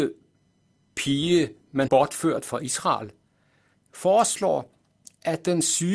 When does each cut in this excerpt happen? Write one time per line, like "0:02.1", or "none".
0:01.9